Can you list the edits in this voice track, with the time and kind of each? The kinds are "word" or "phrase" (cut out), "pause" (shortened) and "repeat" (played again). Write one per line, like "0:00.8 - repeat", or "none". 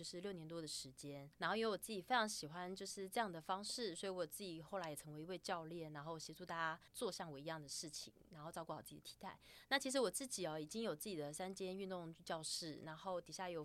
0:01.3 - pause
0:06.9 - pause